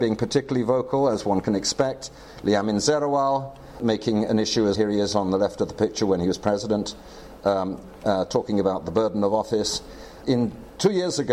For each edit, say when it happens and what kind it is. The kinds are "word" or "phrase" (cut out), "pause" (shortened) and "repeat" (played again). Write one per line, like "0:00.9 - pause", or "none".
0:04.7 - word